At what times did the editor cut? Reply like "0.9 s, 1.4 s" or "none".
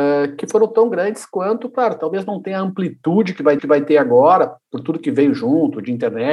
3.6 s